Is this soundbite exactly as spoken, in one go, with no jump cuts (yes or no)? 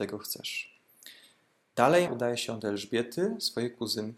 no